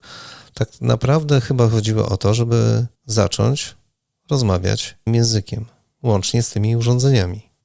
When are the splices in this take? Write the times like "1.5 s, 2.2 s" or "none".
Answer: 2.9 s, 5.1 s